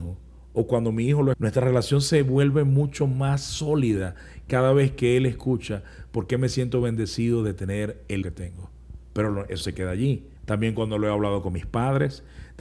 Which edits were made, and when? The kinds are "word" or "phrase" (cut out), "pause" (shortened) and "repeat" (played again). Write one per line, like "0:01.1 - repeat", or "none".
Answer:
0:01.3 - phrase
0:08.2 - word
0:09.0 - pause
0:09.6 - word
0:10.4 - pause